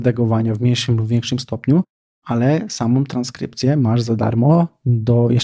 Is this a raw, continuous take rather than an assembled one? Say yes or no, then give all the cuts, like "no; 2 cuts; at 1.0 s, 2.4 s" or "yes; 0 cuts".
yes; 0 cuts